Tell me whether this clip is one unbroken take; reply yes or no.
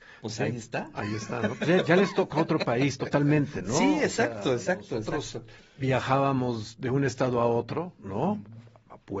no